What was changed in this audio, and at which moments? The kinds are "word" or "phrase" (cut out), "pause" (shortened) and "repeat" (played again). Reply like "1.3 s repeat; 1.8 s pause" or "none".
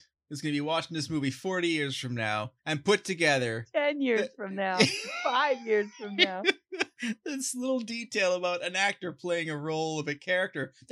2.6 s pause

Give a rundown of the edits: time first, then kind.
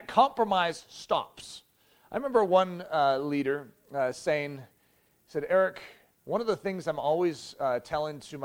none

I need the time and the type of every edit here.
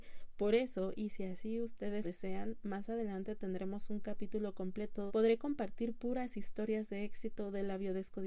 2.0 s word; 5.1 s phrase

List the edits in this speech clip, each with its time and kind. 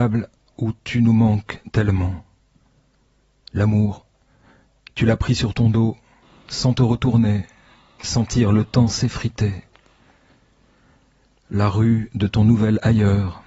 none

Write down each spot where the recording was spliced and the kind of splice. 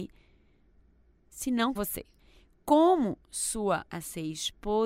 1.8 s word; 2.2 s pause; 3.8 s phrase

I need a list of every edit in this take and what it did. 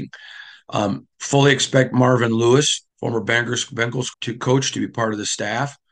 1.1 s pause; 2.9 s pause; 4.1 s word

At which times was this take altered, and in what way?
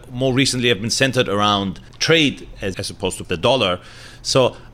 1.9 s pause; 2.7 s phrase; 3.2 s word

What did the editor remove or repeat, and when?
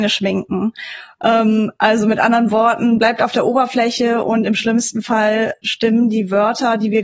none

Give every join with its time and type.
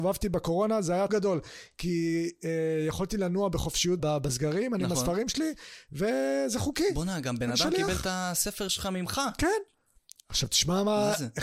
1.1 s word; 4.0 s word

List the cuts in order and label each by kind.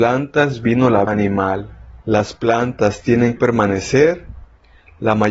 1.1 s word; 2.0 s pause; 3.4 s word

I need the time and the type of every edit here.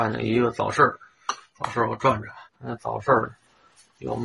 2.5 s pause

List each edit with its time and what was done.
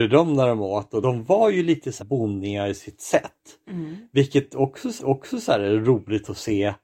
1.0 s word; 2.0 s word; 5.0 s repeat

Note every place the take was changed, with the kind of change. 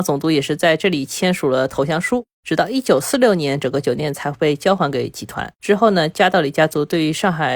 2.3 s pause; 5.5 s pause

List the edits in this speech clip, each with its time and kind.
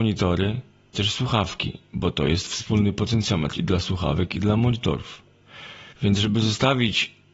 0.9 s word; 5.9 s pause

